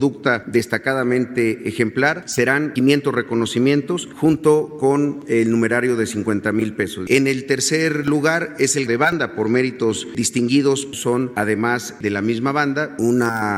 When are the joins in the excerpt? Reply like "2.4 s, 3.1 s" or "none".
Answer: 8.9 s